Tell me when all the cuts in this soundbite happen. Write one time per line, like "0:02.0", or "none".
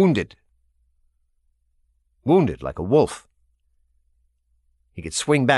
none

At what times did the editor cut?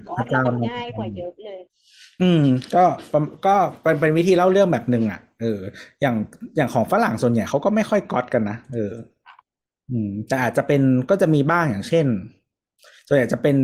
none

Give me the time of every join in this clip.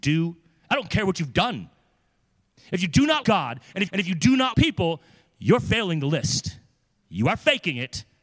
0:03.2
0:03.9
0:04.5

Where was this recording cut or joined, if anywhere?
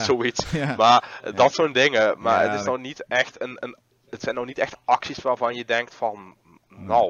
none

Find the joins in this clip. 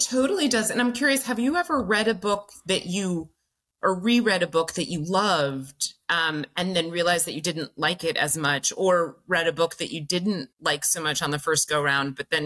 0:10.5

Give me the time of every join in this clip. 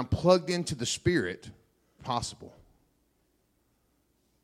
0:02.0

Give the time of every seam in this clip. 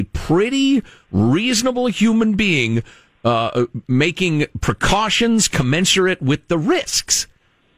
none

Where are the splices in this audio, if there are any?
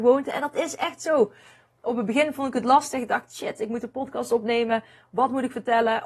none

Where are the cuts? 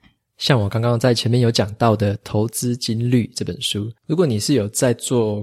0:04.0

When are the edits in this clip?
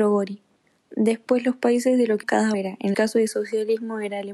0:02.2
0:02.5
0:02.9

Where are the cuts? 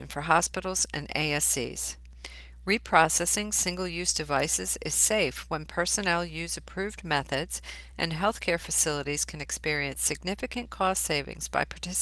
none

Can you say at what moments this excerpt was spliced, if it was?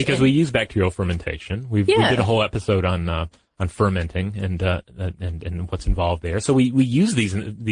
none

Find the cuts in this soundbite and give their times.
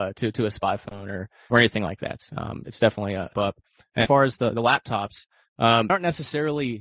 0:01.5
0:02.6
0:03.3
0:04.1
0:05.9

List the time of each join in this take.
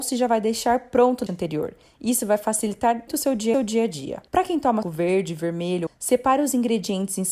0:01.3
0:03.1
0:03.5
0:04.3
0:04.8
0:05.9

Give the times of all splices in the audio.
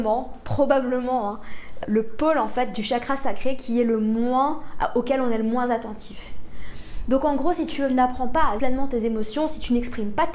0:01.8
0:08.6

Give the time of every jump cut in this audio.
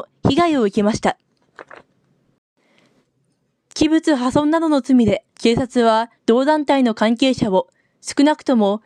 0:05.3
0:06.2

